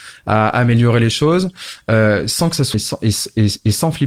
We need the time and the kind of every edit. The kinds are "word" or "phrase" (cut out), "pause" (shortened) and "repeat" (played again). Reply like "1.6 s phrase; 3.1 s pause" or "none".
2.7 s word

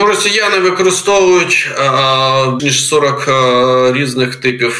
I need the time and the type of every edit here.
2.6 s word

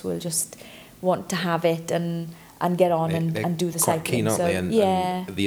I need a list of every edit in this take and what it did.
none

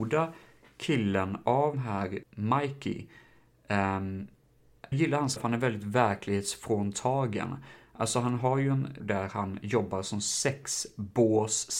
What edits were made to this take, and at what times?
1.7 s word; 2.2 s word; 4.9 s word; 5.4 s word; 9.0 s word

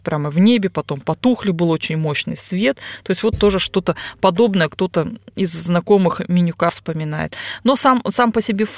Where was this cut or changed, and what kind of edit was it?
none

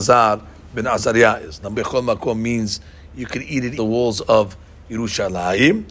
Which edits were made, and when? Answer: 1.7 s word; 3.8 s phrase

